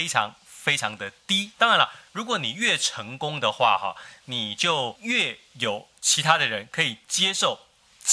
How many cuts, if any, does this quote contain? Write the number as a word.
zero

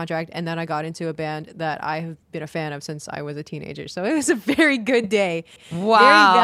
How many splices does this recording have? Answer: one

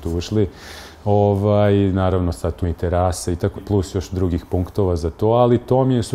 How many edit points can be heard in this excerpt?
two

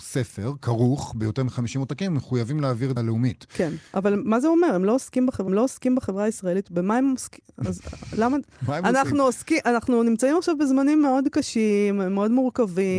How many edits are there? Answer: three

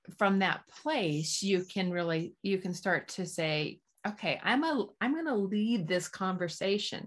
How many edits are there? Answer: one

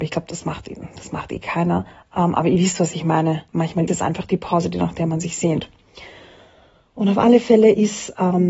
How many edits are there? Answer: two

